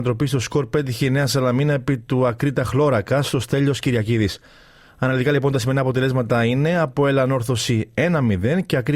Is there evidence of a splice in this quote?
no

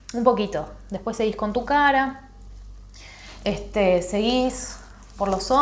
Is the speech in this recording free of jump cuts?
yes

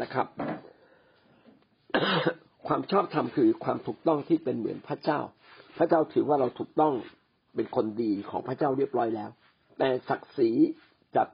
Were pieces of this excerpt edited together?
yes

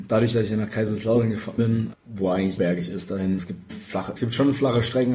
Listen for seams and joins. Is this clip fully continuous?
no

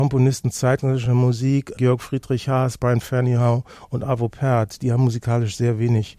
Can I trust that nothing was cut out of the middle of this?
yes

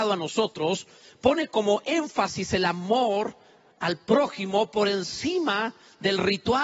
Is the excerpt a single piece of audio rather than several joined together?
yes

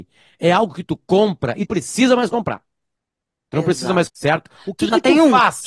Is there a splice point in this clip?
yes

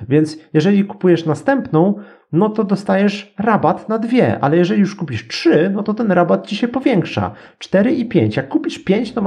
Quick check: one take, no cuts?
yes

